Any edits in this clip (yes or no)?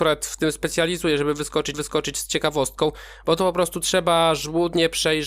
yes